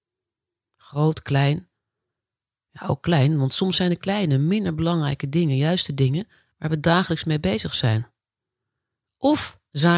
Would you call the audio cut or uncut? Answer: uncut